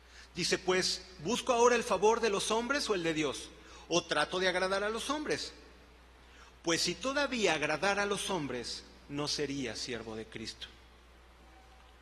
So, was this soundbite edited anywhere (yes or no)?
no